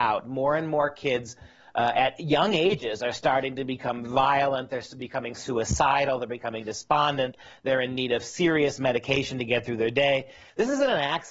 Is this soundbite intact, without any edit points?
yes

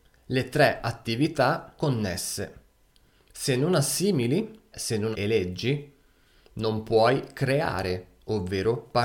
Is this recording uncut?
no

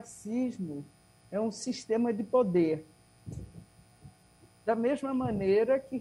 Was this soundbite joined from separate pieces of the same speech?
no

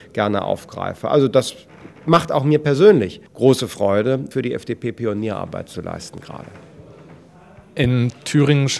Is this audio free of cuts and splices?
no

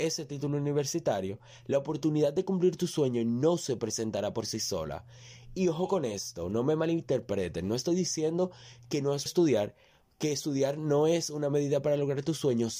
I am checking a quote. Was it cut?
yes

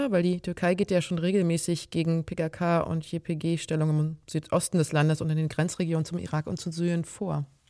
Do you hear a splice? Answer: no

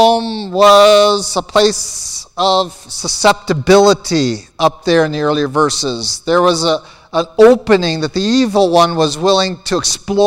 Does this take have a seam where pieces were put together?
no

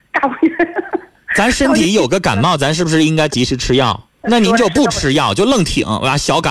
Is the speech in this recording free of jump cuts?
no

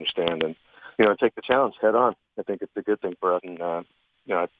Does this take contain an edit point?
yes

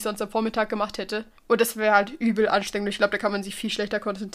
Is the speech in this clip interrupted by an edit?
yes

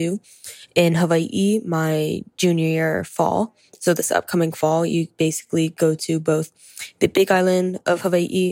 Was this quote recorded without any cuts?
yes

